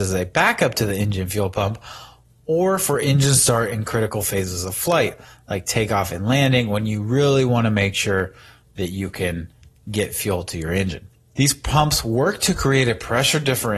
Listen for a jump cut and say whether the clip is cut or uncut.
uncut